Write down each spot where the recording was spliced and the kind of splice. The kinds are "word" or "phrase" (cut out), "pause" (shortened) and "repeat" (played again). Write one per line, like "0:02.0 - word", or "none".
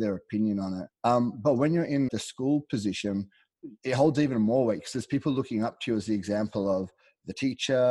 0:00.9 - pause
0:02.1 - word
0:03.8 - pause